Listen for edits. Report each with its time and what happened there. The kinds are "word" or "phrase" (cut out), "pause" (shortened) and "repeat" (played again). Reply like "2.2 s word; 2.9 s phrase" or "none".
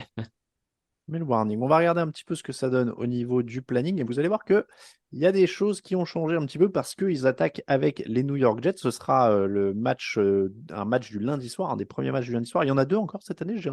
none